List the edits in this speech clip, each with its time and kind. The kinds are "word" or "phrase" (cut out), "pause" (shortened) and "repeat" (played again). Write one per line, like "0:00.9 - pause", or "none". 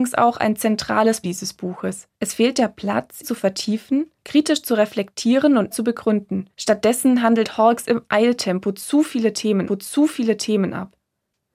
0:01.2 - word
0:02.1 - pause
0:03.2 - word
0:04.2 - pause
0:05.7 - word
0:06.5 - pause
0:09.7 - repeat